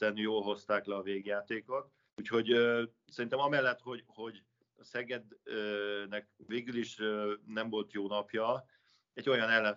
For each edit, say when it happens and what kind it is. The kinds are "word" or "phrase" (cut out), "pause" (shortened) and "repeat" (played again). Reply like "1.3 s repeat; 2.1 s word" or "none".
2.1 s pause; 6.4 s pause